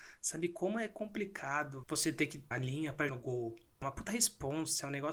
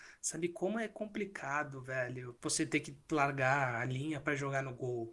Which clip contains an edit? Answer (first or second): first